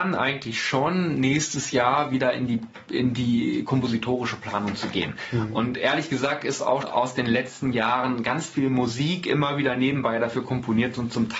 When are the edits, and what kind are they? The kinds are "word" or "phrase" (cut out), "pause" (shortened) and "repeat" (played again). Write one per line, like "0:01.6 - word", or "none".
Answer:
0:06.8 - word